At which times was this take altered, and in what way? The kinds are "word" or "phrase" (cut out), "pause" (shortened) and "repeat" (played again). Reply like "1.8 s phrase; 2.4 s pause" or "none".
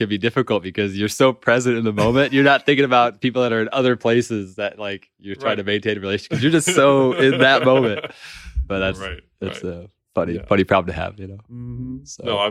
none